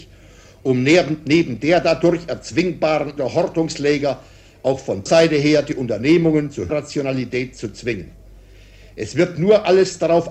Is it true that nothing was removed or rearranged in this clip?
no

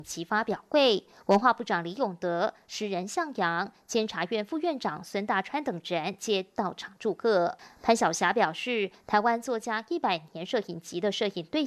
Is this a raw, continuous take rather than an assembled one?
yes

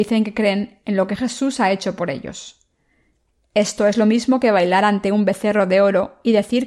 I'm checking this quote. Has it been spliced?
no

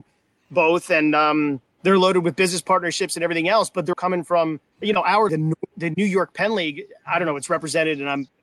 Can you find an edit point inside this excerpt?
yes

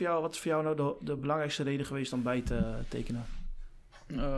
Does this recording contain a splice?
no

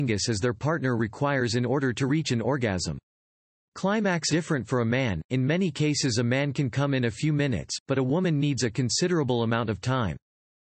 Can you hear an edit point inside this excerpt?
yes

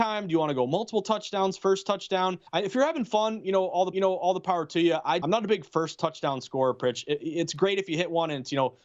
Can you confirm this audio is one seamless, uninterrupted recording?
no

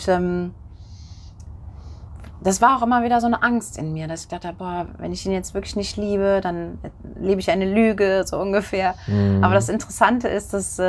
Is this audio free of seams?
yes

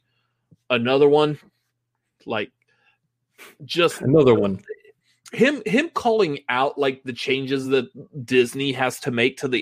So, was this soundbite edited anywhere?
no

